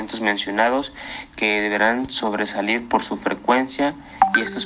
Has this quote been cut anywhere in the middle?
no; 0 cuts

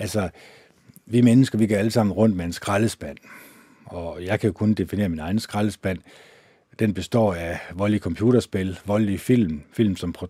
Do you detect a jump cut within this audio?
no; 0 cuts

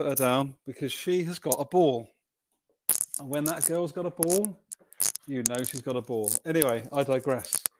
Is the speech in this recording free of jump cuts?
yes; 0 cuts

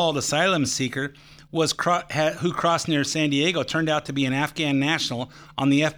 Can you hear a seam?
no; 0 cuts

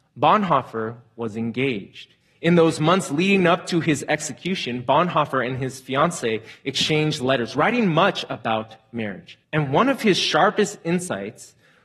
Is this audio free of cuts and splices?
no; 2 cuts; at 2.2 s, 9.4 s

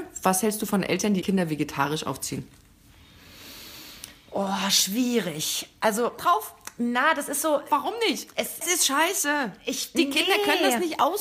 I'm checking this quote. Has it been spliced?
yes; 3 cuts; at 1.2 s, 6.2 s, 8.6 s

